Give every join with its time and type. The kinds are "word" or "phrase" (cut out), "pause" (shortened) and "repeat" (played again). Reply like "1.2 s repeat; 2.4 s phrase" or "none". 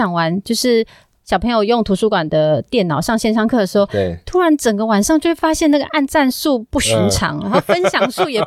none